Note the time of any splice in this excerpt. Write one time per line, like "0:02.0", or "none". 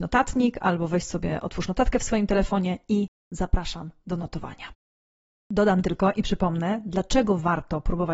none